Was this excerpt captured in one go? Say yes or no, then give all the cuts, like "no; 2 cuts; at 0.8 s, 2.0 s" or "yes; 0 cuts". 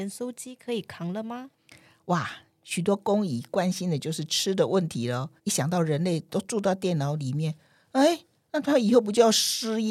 no; 1 cut; at 5.4 s